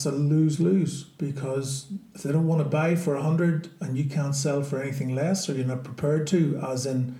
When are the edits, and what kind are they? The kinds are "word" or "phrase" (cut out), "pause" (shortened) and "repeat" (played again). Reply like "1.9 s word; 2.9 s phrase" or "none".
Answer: none